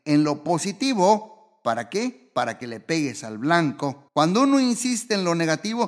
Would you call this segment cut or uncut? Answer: cut